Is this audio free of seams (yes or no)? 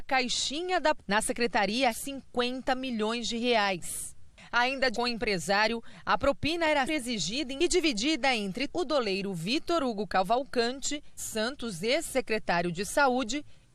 no